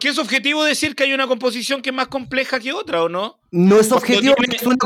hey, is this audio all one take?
yes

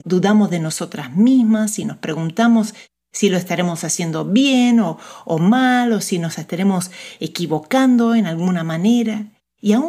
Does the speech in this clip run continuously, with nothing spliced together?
yes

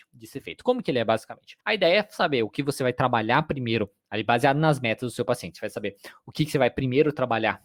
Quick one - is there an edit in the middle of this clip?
yes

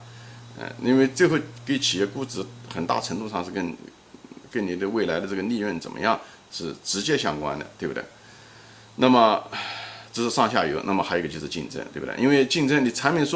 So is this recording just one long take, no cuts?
yes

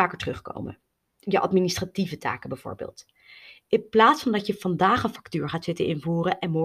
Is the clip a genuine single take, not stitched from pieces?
yes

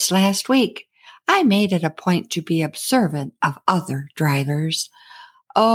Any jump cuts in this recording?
no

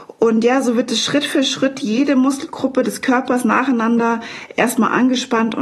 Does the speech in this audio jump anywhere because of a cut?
no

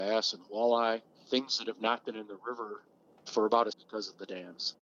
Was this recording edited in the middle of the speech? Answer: yes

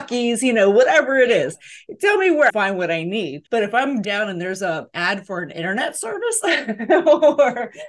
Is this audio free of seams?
no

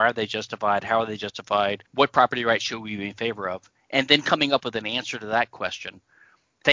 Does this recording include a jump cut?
yes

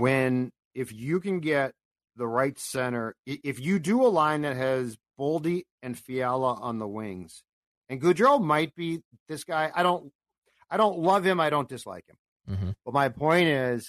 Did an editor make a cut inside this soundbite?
no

